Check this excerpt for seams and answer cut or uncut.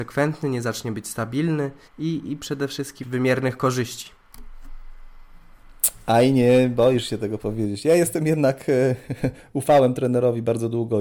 cut